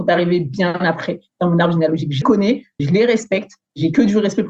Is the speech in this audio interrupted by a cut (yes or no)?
yes